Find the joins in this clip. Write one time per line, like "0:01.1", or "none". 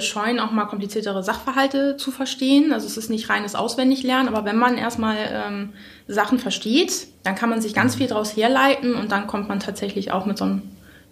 0:07.1